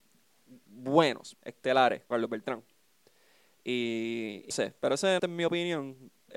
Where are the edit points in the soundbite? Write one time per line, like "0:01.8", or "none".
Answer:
0:01.3
0:02.1
0:04.5
0:05.2